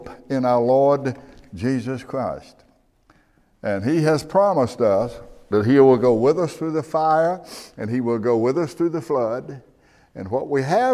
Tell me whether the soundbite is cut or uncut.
uncut